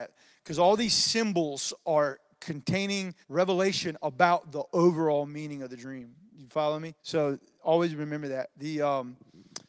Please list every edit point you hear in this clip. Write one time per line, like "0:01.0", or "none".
0:03.2
0:06.3
0:07.0